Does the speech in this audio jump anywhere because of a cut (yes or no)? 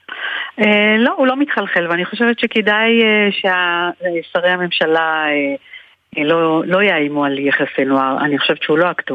no